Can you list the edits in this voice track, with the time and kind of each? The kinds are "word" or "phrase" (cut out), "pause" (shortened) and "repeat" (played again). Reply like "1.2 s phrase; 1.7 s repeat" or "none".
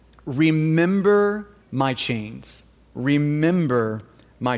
1.6 s pause; 2.7 s pause